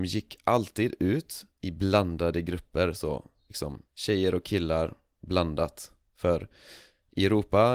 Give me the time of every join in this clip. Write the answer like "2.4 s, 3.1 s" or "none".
3.9 s